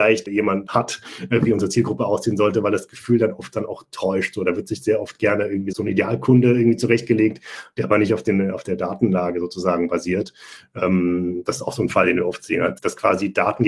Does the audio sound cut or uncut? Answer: uncut